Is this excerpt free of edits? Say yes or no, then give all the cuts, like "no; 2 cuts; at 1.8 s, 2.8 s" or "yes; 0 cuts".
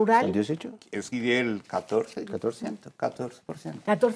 no; 1 cut; at 1.1 s